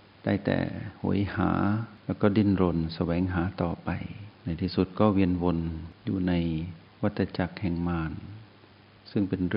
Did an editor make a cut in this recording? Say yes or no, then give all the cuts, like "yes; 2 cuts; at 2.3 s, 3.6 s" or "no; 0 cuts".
yes; 2 cuts; at 2.0 s, 4.3 s